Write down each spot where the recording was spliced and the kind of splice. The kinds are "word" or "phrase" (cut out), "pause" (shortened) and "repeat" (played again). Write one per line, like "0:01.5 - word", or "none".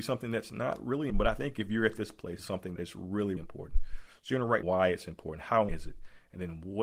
0:01.1 - word
0:02.4 - word
0:02.8 - word
0:03.4 - word
0:04.6 - word
0:05.7 - word